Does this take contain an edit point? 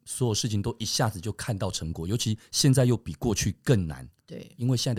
no; 0 cuts

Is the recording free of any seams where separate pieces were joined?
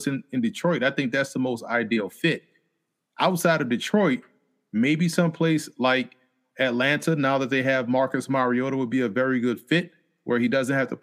yes; 0 cuts

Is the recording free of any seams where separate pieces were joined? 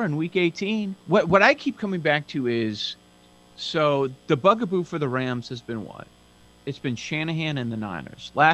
no; 1 cut; at 1.0 s

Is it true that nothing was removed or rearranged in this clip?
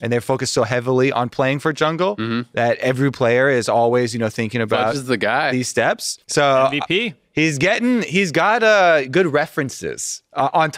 no; 1 cut; at 6.2 s

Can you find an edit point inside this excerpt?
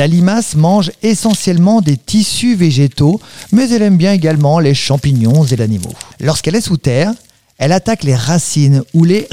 yes; 2 cuts; at 5.6 s, 6.1 s

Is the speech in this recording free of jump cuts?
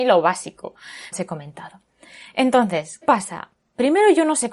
no; 2 cuts; at 1.1 s, 3.0 s

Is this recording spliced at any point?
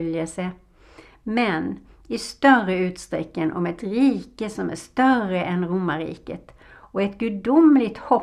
no; 0 cuts

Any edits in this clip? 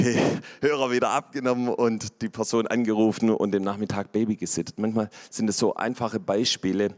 no; 0 cuts

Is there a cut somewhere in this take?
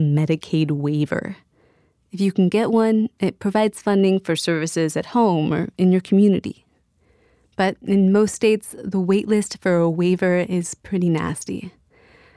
no; 0 cuts

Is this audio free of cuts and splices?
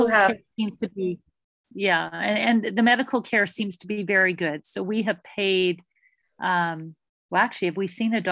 yes; 0 cuts

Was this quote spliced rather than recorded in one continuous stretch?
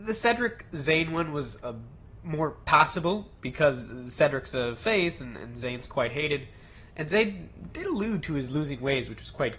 no; 0 cuts

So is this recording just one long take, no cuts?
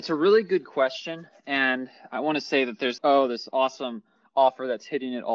no; 1 cut; at 3.0 s

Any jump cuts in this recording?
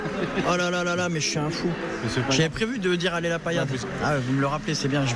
no; 0 cuts

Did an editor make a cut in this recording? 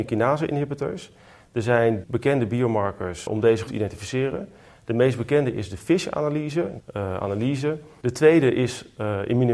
yes; 4 cuts; at 2.0 s, 3.3 s, 3.7 s, 6.8 s

